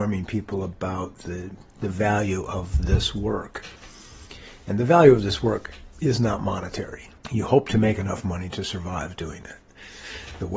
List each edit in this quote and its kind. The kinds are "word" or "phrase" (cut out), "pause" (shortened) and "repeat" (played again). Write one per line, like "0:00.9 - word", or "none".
0:05.9 - pause